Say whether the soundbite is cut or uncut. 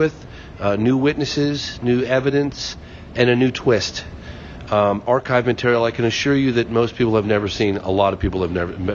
uncut